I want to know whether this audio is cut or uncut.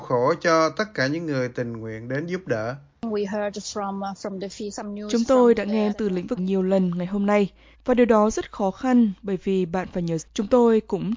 cut